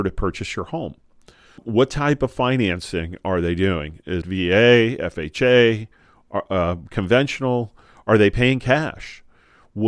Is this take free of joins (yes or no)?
no